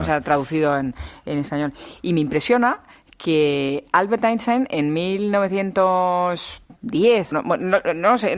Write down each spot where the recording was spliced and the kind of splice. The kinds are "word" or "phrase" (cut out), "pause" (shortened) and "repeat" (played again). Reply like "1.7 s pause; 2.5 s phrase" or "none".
7.3 s word